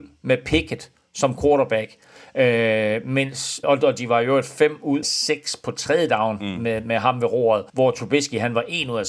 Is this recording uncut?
no; 3 cuts; at 3.6 s, 5.0 s, 7.7 s

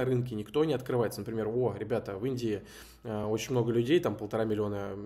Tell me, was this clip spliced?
no; 0 cuts

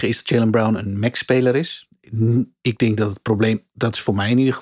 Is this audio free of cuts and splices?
yes; 0 cuts

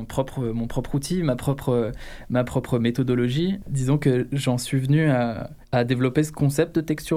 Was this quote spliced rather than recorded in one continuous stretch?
yes; 1 cut; at 5.6 s

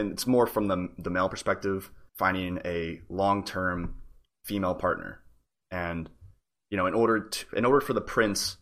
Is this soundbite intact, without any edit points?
no; 1 cut; at 2.1 s

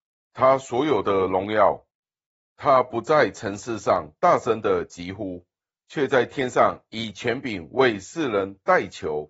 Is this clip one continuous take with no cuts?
yes; 0 cuts

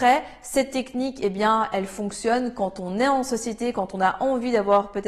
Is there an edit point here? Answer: no; 0 cuts

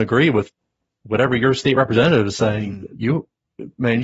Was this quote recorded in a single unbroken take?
yes; 0 cuts

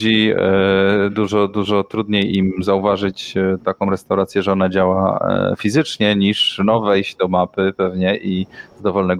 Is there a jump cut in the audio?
no; 0 cuts

